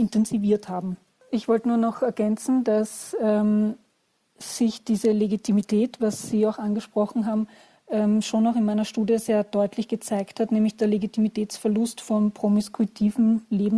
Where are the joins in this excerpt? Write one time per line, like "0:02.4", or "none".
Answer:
none